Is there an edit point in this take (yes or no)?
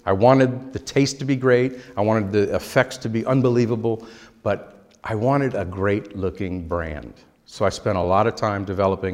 no